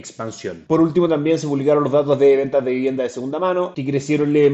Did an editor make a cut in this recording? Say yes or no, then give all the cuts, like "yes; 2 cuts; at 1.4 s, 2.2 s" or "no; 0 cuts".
no; 0 cuts